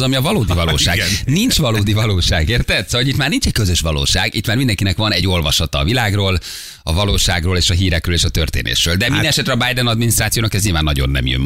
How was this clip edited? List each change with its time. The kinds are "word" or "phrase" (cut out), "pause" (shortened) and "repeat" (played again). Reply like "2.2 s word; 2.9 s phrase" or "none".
none